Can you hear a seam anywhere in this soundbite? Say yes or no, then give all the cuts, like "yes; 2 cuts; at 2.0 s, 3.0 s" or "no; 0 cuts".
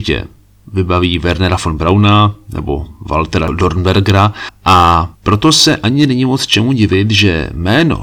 yes; 1 cut; at 5.2 s